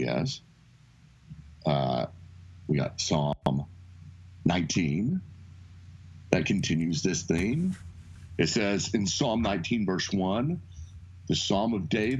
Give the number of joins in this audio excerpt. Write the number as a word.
zero